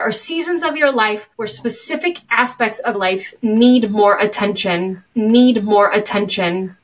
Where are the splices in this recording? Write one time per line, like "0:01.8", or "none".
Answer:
0:01.3
0:02.9
0:05.1